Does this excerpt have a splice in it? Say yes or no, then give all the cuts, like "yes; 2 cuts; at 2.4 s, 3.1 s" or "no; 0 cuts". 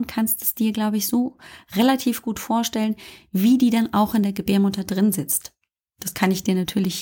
no; 0 cuts